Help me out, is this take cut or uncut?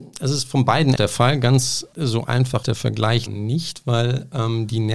cut